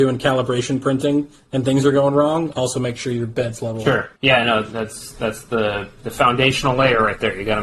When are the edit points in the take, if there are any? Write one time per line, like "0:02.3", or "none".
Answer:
0:04.2
0:06.0